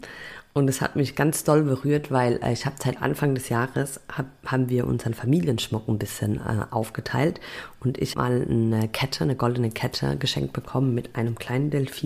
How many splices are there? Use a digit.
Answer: 1